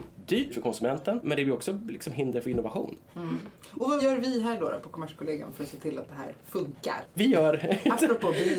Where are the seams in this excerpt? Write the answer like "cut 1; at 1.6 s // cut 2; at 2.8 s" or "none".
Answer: cut 1; at 7.1 s